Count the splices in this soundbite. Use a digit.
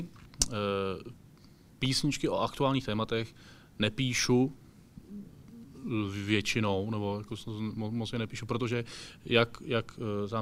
0